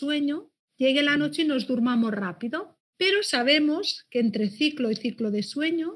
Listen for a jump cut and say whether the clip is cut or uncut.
uncut